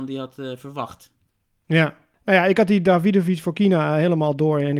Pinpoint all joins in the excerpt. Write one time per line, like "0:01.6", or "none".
none

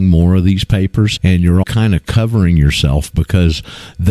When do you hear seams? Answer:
0:01.2
0:01.6

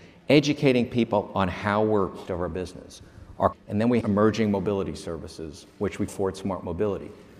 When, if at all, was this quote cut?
0:02.3
0:03.5
0:04.0
0:05.7
0:06.1

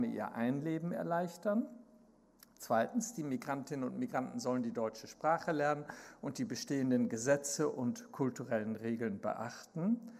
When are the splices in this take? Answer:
none

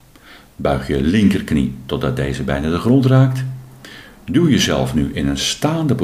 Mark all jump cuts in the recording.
none

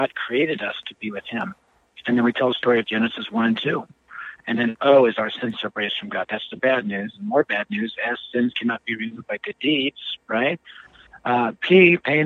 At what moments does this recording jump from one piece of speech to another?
none

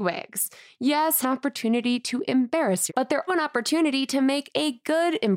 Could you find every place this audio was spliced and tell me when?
0:01.2
0:02.9
0:03.3

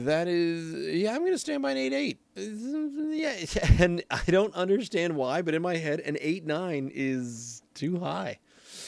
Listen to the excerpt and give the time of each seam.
0:02.3

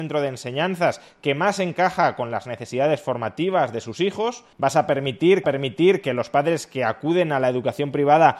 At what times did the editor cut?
0:04.5
0:05.4

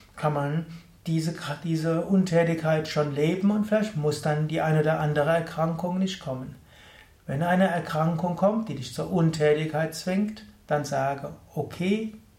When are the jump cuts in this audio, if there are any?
none

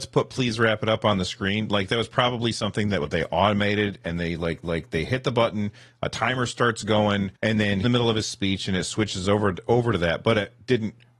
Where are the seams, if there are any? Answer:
0:04.6
0:07.4
0:07.8

